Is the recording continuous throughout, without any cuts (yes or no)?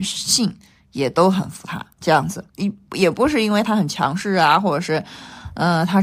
no